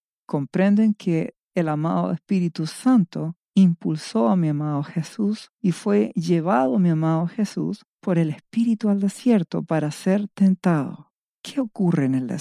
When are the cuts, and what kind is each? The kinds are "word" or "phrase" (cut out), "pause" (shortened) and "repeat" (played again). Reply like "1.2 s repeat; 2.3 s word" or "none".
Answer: 7.9 s pause; 11.2 s pause